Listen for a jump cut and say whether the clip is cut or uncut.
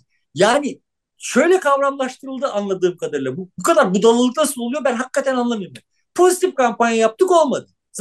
uncut